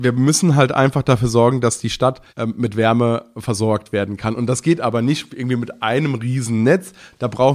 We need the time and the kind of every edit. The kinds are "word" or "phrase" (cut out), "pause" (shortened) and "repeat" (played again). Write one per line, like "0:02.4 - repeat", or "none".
0:02.3 - pause